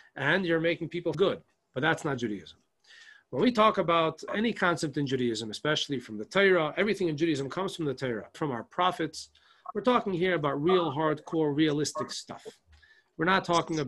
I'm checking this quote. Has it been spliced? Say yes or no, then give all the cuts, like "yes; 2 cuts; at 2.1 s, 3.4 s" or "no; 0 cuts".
yes; 3 cuts; at 1.1 s, 4.3 s, 8.3 s